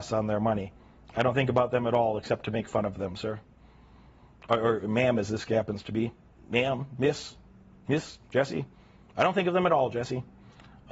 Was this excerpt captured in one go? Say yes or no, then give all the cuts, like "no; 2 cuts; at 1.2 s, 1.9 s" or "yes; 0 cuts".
yes; 0 cuts